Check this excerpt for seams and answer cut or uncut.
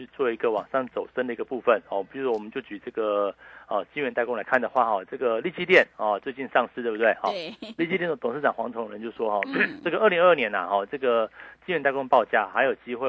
uncut